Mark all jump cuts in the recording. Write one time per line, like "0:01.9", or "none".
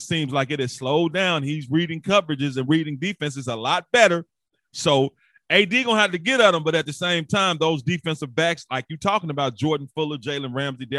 none